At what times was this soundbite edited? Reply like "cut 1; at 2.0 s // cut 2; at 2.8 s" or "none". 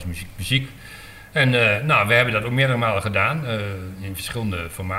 none